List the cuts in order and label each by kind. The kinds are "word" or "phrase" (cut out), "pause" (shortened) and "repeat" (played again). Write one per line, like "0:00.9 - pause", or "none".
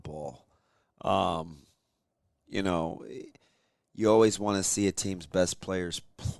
none